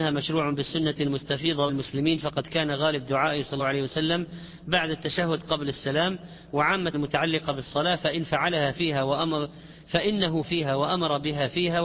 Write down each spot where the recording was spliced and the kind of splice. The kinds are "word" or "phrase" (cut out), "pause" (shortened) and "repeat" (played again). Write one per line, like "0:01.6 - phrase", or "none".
0:01.7 - word
0:03.6 - word
0:06.9 - word
0:10.4 - word